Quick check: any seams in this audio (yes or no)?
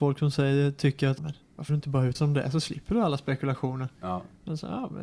yes